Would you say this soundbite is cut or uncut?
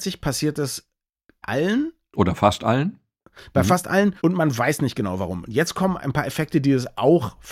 cut